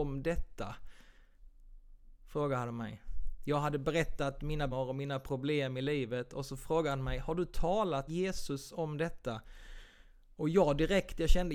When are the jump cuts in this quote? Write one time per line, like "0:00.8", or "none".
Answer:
0:04.7
0:08.1